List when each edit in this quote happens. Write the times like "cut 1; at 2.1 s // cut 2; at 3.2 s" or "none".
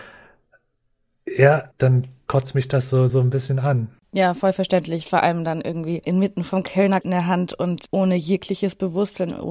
cut 1; at 1.7 s // cut 2; at 3.1 s // cut 3; at 7.0 s